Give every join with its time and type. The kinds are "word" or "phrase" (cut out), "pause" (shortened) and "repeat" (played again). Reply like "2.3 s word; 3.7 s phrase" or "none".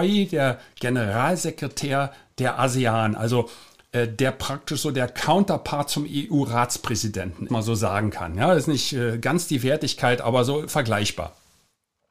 7.5 s phrase